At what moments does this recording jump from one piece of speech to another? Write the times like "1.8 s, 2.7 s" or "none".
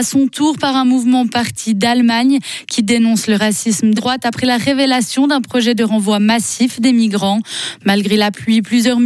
4.0 s